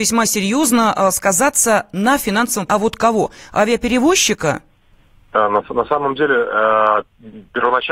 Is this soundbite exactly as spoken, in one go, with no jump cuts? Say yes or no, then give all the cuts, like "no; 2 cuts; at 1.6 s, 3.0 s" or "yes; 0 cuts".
no; 2 cuts; at 2.7 s, 4.9 s